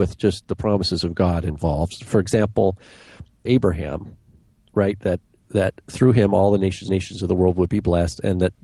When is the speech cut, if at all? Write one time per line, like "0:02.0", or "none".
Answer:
0:03.5
0:05.4
0:06.9